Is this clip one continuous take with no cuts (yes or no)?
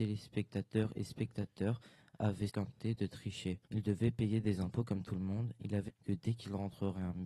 no